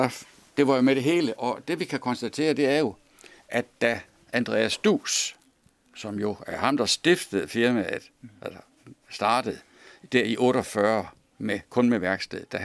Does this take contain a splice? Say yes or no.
yes